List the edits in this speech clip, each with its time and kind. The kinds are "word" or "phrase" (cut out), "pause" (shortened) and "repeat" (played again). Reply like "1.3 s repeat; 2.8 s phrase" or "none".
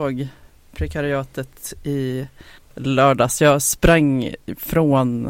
2.6 s pause